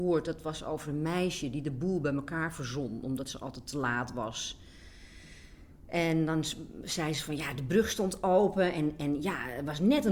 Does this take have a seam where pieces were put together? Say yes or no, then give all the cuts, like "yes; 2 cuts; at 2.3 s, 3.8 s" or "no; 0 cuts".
no; 0 cuts